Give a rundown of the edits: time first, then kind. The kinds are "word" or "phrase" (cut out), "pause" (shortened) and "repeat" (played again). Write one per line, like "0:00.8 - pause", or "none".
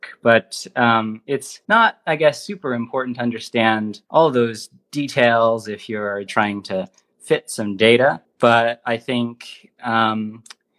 0:01.6 - pause
0:04.0 - pause
0:06.3 - word
0:08.2 - pause